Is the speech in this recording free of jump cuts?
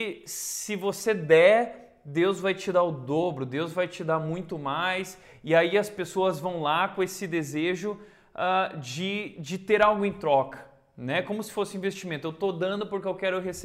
yes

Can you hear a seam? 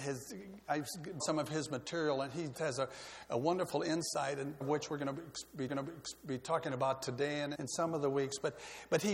yes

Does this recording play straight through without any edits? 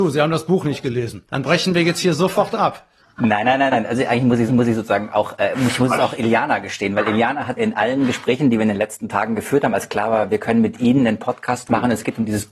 no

